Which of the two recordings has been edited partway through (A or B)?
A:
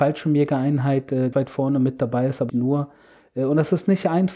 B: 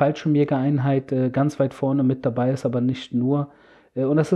A